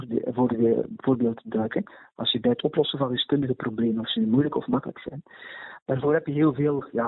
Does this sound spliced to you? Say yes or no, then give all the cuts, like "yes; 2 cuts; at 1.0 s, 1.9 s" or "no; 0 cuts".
no; 0 cuts